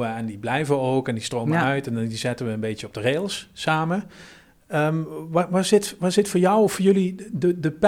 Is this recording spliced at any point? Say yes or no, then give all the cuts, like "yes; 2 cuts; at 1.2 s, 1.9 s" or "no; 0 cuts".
no; 0 cuts